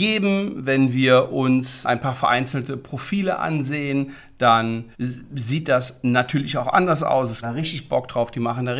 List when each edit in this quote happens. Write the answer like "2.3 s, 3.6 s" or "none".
1.8 s, 4.9 s, 7.4 s